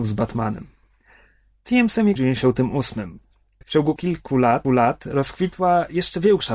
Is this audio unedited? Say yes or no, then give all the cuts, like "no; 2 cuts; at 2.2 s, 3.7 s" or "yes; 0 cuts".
no; 4 cuts; at 2.2 s, 3.6 s, 4.0 s, 4.6 s